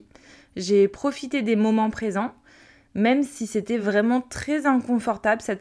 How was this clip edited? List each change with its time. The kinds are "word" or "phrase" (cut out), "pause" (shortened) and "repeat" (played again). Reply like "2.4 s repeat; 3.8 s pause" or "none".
none

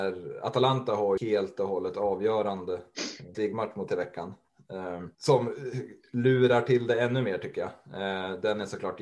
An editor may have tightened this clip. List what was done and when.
1.2 s word; 3.3 s word; 3.9 s word; 5.1 s pause

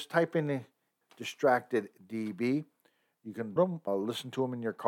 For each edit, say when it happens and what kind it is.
1.0 s word; 3.6 s word; 3.9 s word

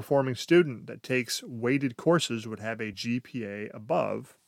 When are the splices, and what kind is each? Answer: none

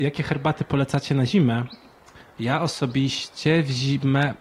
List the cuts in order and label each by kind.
none

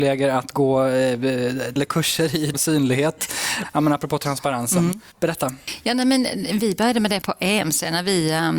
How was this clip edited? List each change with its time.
1.8 s word; 2.5 s word; 7.2 s word

